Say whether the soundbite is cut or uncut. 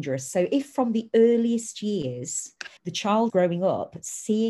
cut